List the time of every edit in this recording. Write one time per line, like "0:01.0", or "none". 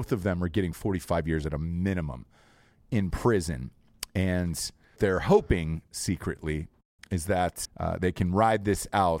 0:05.0
0:07.6